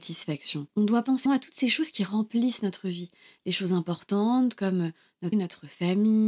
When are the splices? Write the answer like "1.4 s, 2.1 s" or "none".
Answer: 1.3 s, 5.3 s